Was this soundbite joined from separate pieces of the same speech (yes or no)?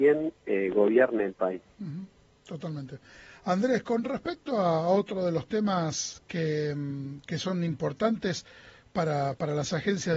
no